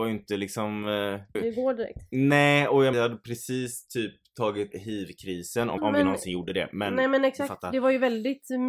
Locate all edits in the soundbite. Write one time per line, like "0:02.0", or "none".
0:01.3
0:02.9
0:04.7
0:05.8